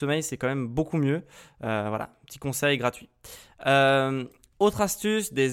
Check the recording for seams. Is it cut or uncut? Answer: uncut